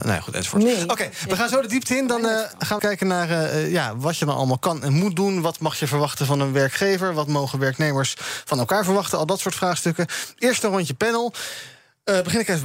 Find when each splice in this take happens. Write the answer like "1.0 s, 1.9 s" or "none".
2.8 s